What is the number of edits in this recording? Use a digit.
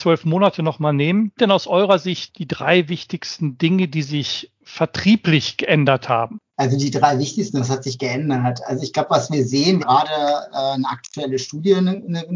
3